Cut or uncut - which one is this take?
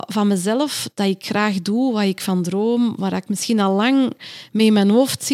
uncut